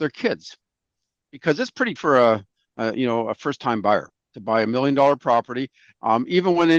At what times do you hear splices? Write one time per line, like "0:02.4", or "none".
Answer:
0:02.0